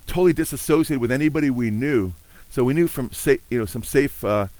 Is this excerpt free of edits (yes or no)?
yes